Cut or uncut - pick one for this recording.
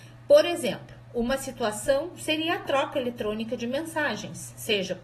uncut